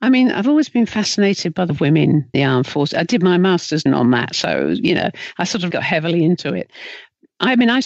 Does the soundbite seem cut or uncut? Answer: cut